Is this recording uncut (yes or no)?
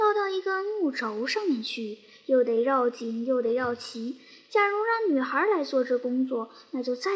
yes